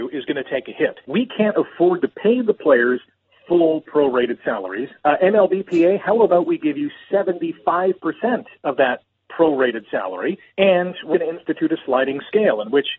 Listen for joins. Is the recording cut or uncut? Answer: cut